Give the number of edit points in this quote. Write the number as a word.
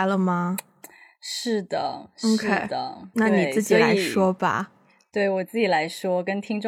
one